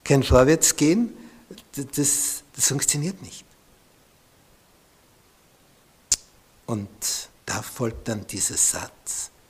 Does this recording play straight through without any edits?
no; 2 cuts; at 2.5 s, 7.3 s

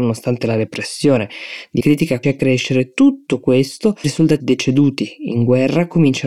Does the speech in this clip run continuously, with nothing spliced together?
no; 4 cuts; at 1.8 s, 2.2 s, 4.0 s, 4.4 s

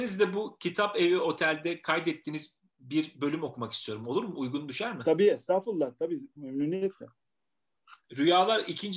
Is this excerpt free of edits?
yes; 0 cuts

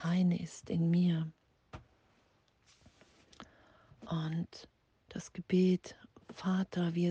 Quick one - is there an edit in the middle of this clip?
yes; 1 cut; at 4.8 s

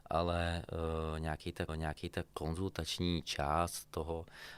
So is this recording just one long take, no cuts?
no; 1 cut; at 1.7 s

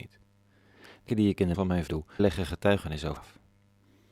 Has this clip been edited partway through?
yes; 5 cuts; at 1.1 s, 1.5 s, 1.9 s, 2.2 s, 3.2 s

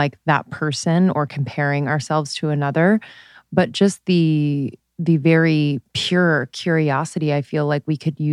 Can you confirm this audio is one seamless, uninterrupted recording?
yes; 0 cuts

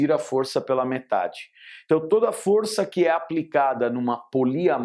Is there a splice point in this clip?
no; 0 cuts

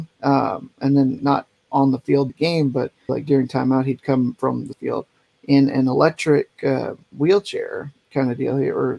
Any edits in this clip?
yes; 4 cuts; at 1.2 s, 2.3 s, 3.1 s, 4.7 s

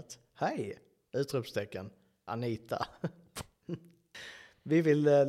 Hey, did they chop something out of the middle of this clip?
no; 0 cuts

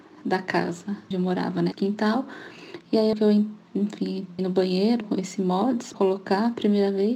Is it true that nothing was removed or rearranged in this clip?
no; 6 cuts; at 1.1 s, 1.7 s, 3.1 s, 4.4 s, 5.0 s, 5.9 s

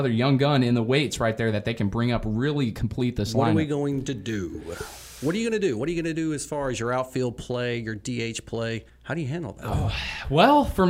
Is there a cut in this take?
yes; 1 cut; at 8.9 s

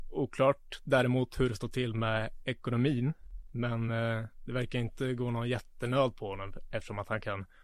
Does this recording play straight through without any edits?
yes; 0 cuts

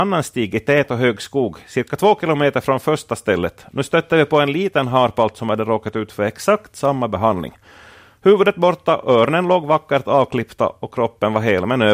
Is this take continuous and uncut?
yes; 0 cuts

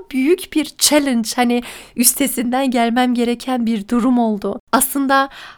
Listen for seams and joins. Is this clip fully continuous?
yes; 0 cuts

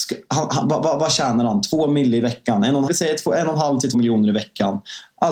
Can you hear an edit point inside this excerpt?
yes; 2 cuts; at 2.9 s, 3.9 s

